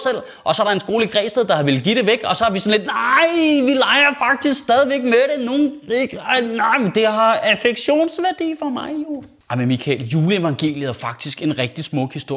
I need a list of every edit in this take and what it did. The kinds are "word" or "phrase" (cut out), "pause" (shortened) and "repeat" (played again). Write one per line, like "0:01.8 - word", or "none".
none

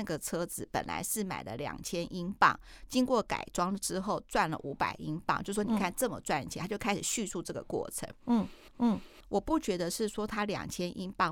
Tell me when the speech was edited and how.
0:08.7 - repeat

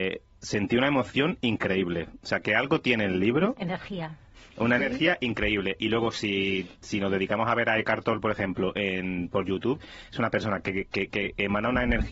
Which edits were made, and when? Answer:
0:04.8 - phrase
0:06.7 - pause

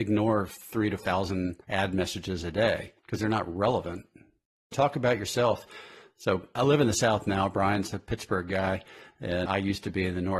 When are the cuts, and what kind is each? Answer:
0:01.0 - word
0:01.6 - pause
0:03.0 - pause
0:04.7 - phrase
0:06.6 - word
0:09.5 - word

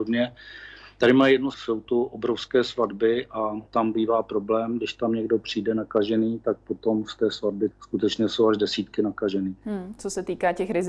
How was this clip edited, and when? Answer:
0:01.5 - word
0:03.7 - pause
0:07.7 - word

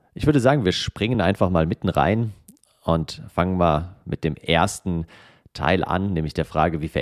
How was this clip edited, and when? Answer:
none

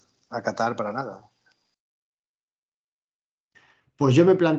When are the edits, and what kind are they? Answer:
none

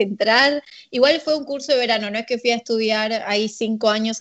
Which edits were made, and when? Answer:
none

